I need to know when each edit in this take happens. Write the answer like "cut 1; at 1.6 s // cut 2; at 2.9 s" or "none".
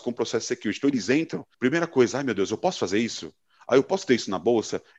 cut 1; at 1.5 s